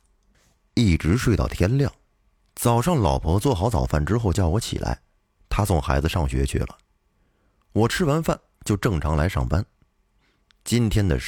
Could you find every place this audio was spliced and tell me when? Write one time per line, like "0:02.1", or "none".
none